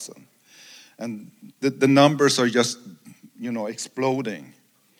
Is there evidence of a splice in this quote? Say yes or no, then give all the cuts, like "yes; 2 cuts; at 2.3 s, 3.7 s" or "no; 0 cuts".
no; 0 cuts